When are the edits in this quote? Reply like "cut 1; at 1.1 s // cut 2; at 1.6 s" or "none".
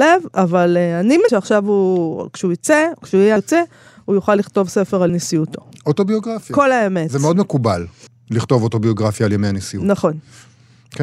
cut 1; at 1.3 s // cut 2; at 3.4 s // cut 3; at 5.1 s // cut 4; at 8.1 s